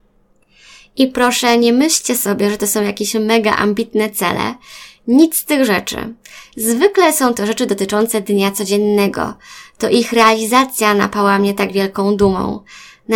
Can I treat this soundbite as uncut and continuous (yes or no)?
yes